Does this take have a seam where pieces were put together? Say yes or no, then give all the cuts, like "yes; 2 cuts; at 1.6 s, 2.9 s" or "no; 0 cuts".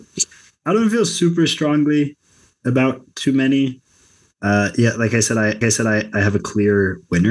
yes; 1 cut; at 5.6 s